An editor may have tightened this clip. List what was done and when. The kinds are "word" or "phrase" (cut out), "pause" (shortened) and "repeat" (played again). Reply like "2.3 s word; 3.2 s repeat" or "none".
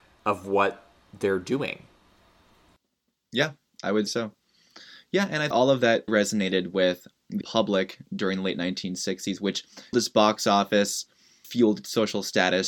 4.1 s word; 5.5 s word; 6.1 s word; 7.4 s word; 9.9 s word; 11.4 s word